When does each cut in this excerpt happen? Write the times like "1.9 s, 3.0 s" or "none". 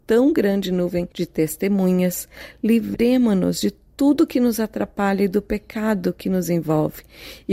none